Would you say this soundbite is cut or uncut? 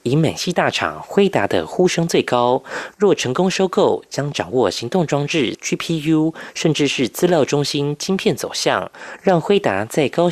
cut